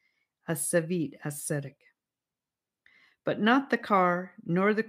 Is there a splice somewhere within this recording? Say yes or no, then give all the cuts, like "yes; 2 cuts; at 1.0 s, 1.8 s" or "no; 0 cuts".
no; 0 cuts